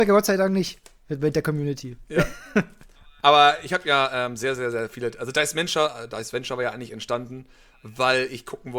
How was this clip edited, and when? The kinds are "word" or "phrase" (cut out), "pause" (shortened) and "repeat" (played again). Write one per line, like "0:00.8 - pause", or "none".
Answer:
none